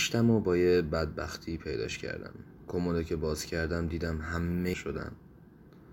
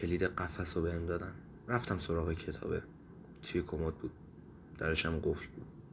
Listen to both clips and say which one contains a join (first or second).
first